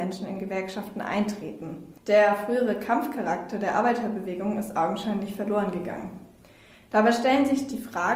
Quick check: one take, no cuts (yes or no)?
no